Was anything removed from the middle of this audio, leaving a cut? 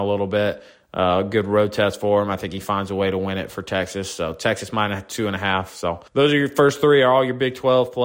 yes; 1 cut; at 6.1 s

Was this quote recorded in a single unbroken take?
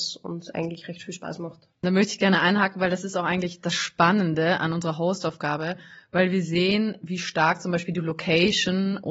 yes; 0 cuts

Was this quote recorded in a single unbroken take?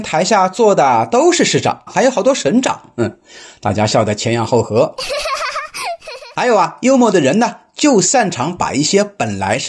no; 1 cut; at 1.9 s

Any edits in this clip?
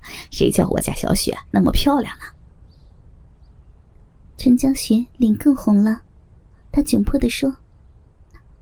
no; 0 cuts

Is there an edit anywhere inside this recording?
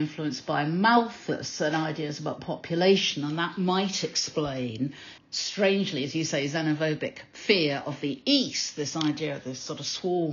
yes; 1 cut; at 5.2 s

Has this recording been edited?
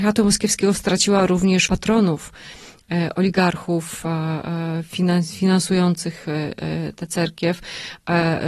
yes; 1 cut; at 1.7 s

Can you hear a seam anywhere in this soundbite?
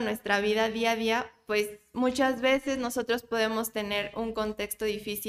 no; 0 cuts

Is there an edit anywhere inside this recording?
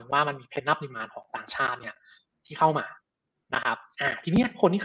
no; 0 cuts

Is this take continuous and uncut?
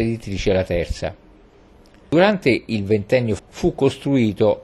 no; 1 cut; at 3.4 s

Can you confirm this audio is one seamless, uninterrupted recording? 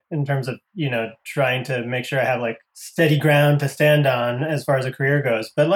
no; 1 cut; at 2.7 s

